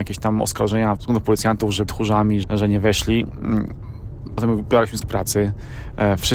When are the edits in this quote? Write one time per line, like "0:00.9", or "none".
0:01.0
0:01.9
0:02.4
0:04.4
0:05.0